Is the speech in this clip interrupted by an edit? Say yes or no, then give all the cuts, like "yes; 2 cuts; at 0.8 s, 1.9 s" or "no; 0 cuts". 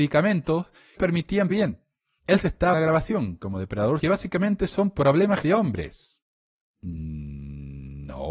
yes; 5 cuts; at 1.0 s, 1.5 s, 2.7 s, 4.0 s, 5.4 s